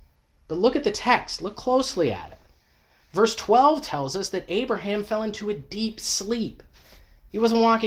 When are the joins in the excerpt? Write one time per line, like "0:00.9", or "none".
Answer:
none